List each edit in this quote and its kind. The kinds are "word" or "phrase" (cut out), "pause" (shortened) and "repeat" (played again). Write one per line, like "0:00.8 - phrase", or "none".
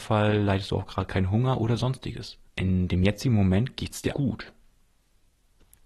0:02.5 - pause
0:04.1 - word